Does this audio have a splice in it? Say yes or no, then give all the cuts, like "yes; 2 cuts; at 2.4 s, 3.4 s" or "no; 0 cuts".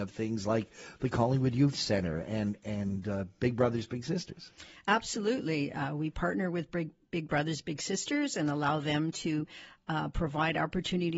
no; 0 cuts